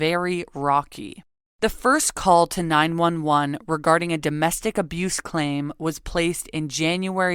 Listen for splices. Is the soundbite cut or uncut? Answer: uncut